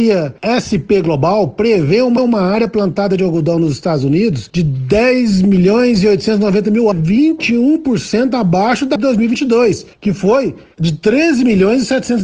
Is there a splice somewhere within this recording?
yes; 4 cuts; at 2.2 s, 6.9 s, 9.0 s, 9.9 s

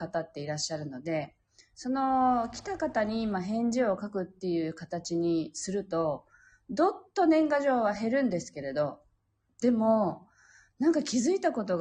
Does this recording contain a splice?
no; 0 cuts

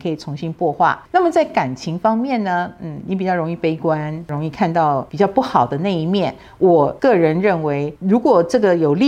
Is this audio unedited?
yes; 0 cuts

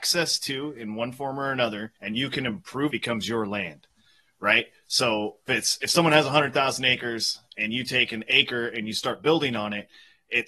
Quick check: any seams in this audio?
yes; 3 cuts; at 2.0 s, 2.9 s, 5.5 s

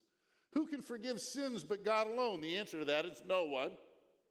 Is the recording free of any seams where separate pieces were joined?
yes; 0 cuts

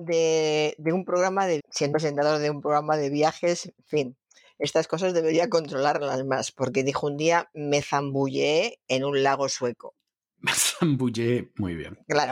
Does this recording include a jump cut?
yes; 2 cuts; at 1.6 s, 1.9 s

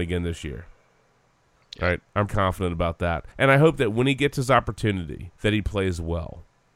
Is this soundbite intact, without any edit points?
no; 3 cuts; at 2.3 s, 3.3 s, 5.4 s

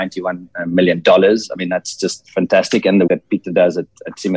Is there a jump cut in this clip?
yes; 1 cut; at 3.1 s

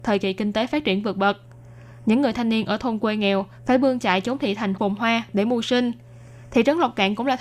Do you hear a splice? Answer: no; 0 cuts

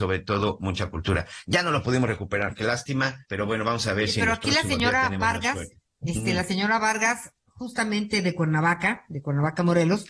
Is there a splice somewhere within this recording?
yes; 2 cuts; at 3.2 s, 7.4 s

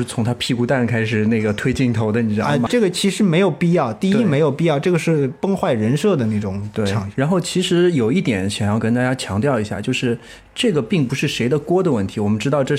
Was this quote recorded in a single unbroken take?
no; 1 cut; at 2.7 s

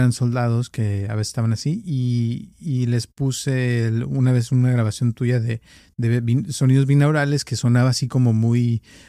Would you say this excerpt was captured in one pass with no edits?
yes; 0 cuts

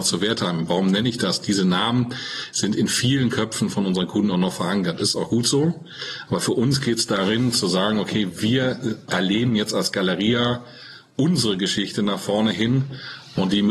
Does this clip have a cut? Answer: no; 0 cuts

